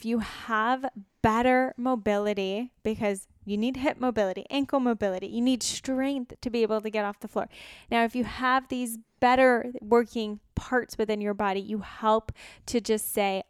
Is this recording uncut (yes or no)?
yes